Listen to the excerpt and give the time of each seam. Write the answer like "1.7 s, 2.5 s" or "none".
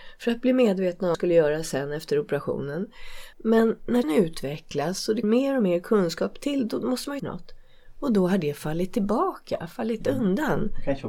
1.1 s, 3.3 s, 4.0 s, 5.2 s, 7.2 s